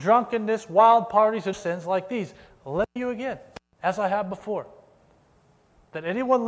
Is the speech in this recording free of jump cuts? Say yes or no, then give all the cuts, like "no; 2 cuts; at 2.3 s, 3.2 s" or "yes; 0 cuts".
no; 2 cuts; at 1.5 s, 3.0 s